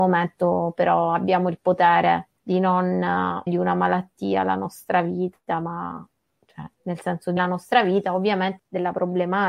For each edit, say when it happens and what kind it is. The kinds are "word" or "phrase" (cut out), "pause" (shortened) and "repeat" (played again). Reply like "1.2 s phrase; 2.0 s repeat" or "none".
2.4 s pause; 3.5 s word; 6.7 s pause; 7.4 s word; 8.6 s phrase